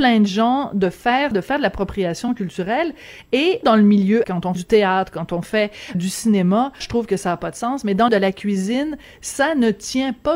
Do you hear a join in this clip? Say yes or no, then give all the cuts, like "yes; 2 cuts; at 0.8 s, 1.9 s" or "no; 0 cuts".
yes; 7 cuts; at 1.3 s, 3.6 s, 4.2 s, 4.5 s, 5.9 s, 6.8 s, 8.1 s